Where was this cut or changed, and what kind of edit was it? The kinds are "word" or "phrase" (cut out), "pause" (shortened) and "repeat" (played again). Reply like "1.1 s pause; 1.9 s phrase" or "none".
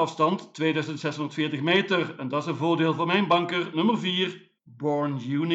4.6 s pause